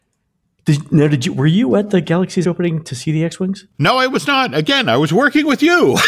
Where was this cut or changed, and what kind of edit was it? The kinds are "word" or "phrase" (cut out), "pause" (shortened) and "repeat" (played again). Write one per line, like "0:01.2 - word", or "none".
0:02.4 - word
0:03.7 - pause